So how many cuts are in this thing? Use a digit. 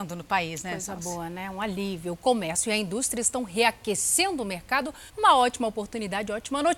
1